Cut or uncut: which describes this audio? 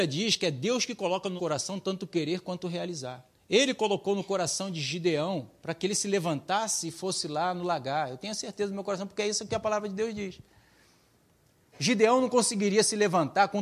cut